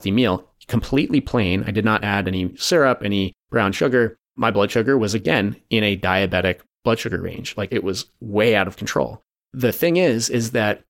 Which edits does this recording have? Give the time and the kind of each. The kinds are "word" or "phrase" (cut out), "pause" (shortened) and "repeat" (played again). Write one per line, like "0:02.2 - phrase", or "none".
none